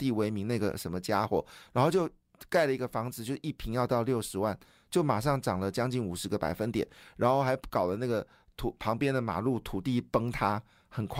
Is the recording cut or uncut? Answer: uncut